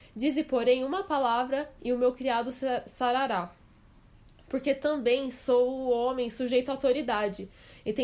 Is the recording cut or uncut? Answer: uncut